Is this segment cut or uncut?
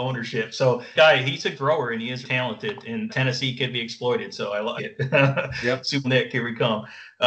cut